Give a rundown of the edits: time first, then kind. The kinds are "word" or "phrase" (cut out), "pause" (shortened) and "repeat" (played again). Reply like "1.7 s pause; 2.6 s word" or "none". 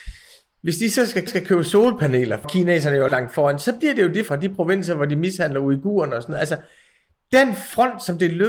1.3 s repeat; 2.4 s phrase; 3.1 s word; 4.3 s word